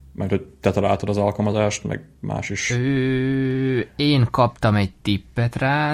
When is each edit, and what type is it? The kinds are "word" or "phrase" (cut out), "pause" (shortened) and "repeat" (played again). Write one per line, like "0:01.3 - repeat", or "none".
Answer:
0:02.2 - pause